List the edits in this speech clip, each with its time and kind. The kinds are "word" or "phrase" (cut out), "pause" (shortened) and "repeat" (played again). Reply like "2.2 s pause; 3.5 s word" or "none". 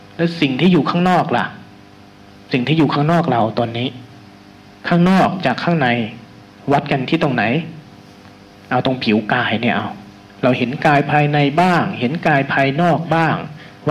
none

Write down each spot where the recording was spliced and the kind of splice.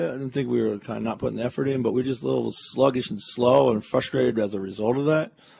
none

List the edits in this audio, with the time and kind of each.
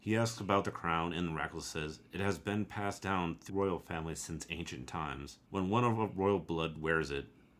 3.5 s word; 5.5 s pause

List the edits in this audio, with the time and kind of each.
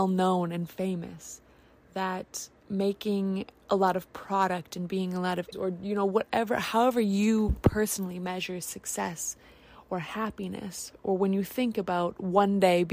5.5 s word

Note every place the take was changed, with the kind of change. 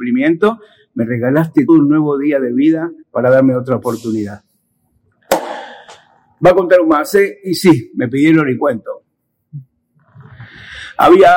1.7 s word; 3.0 s pause

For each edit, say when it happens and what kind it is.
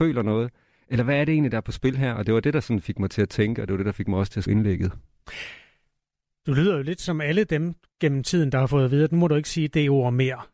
4.5 s word

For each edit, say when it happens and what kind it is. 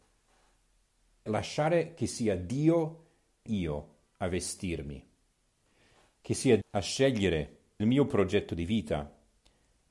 1.3 s word; 3.5 s word; 6.6 s word; 7.8 s word

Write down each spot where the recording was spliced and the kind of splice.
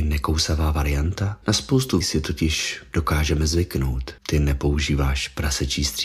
1.4 s word; 2.0 s word; 4.2 s pause

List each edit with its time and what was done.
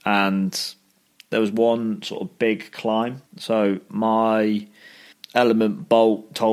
3.3 s pause; 5.1 s pause

